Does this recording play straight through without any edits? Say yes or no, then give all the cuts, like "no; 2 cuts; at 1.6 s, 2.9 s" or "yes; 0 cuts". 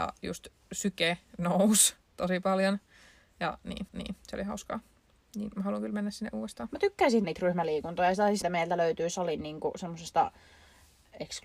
no; 3 cuts; at 3.9 s, 7.2 s, 8.4 s